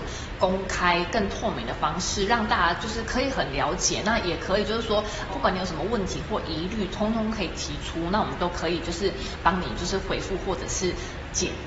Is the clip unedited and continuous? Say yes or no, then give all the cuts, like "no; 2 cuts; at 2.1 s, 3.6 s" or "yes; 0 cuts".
no; 1 cut; at 5.3 s